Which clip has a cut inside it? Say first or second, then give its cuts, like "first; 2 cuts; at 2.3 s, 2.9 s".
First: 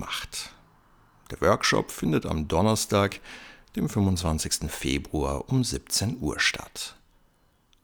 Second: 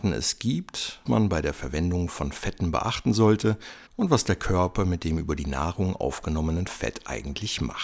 second; 2 cuts; at 1.1 s, 3.9 s